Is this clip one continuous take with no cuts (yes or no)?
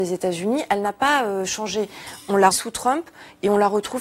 no